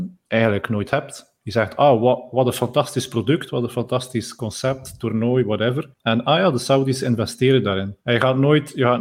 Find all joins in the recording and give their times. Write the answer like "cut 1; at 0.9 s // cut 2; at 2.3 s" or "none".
cut 1; at 5.9 s // cut 2; at 8.0 s